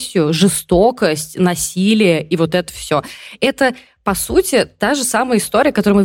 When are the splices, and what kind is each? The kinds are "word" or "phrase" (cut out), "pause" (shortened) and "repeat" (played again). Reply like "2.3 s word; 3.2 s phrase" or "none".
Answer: none